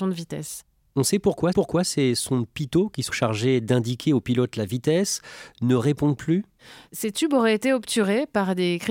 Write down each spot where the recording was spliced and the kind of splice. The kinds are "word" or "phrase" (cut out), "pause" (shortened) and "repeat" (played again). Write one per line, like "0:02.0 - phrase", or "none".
0:01.5 - repeat
0:03.1 - word